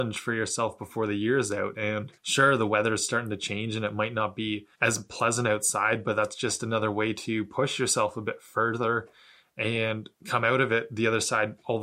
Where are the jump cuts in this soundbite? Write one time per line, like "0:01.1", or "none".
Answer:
0:02.2
0:04.7
0:10.1